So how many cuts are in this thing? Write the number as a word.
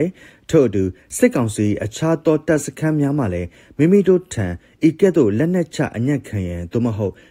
zero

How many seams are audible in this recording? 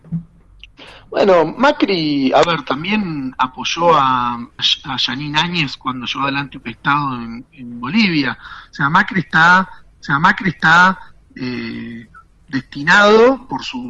four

